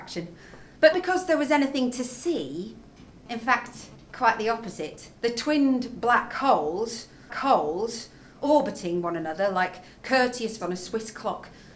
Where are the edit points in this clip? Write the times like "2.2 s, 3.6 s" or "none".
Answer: 0.9 s, 5.2 s, 7.3 s, 10.6 s